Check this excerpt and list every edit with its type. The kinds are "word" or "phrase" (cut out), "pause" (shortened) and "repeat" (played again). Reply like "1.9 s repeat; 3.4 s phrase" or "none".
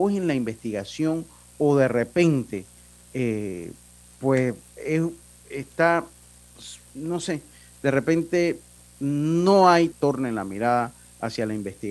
9.9 s phrase